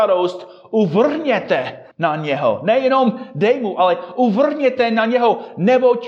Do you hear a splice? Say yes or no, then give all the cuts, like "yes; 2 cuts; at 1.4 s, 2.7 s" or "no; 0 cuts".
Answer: yes; 1 cut; at 1.9 s